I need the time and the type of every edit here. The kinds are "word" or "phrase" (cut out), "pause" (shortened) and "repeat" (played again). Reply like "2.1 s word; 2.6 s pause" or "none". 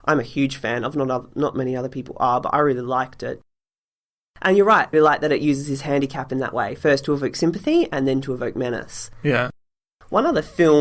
4.9 s word